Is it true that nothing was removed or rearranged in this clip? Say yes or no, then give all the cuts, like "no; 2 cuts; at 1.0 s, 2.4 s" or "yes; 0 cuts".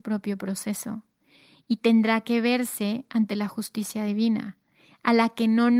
yes; 0 cuts